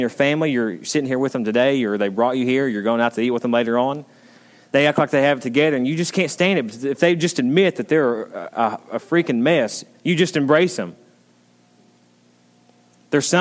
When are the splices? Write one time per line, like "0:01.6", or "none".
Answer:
none

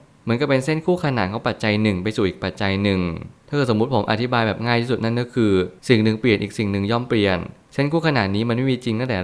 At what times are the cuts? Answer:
0:03.4
0:05.8

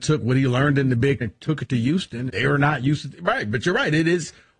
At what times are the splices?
0:01.2
0:02.3

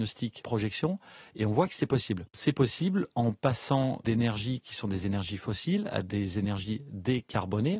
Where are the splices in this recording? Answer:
none

